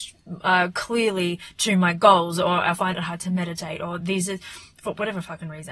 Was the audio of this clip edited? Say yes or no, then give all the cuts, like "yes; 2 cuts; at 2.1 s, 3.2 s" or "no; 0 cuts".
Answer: no; 0 cuts